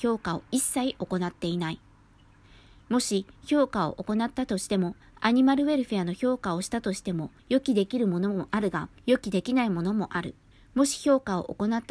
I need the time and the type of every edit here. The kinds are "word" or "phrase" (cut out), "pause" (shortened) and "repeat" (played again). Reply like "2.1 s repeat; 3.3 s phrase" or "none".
5.0 s pause; 7.4 s pause; 9.0 s pause; 10.5 s pause